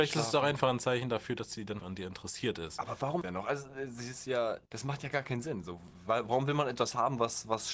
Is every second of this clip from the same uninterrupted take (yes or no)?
no